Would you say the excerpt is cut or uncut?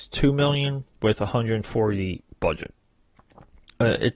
uncut